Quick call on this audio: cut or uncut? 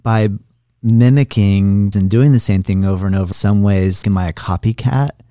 cut